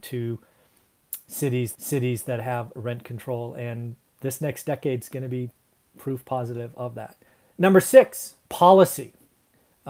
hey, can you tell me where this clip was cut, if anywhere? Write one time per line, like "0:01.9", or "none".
0:01.7
0:07.3
0:08.4